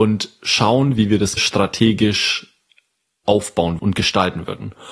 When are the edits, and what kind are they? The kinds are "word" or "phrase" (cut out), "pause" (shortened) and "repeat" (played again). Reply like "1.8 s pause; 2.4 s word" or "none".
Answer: 1.4 s word; 3.8 s word